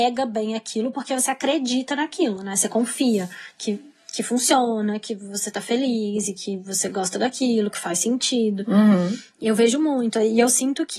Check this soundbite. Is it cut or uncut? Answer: uncut